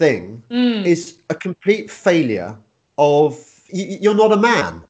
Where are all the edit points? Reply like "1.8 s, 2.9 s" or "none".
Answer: 3.7 s